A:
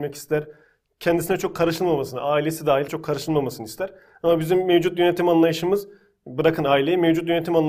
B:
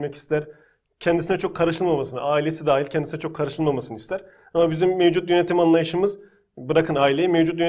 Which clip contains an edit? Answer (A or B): A